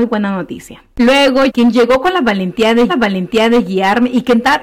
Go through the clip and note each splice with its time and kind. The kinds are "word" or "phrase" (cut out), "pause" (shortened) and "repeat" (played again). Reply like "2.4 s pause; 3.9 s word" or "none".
1.5 s phrase; 2.9 s repeat